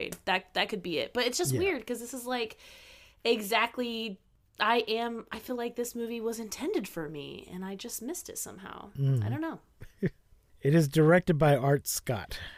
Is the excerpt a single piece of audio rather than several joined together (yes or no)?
yes